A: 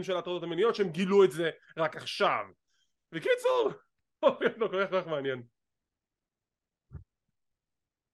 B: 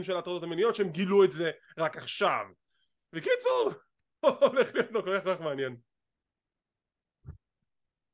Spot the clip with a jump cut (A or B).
A